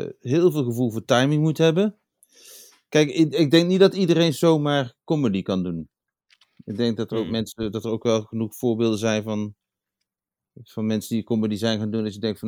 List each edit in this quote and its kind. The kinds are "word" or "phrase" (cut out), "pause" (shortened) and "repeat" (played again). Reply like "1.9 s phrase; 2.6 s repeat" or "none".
none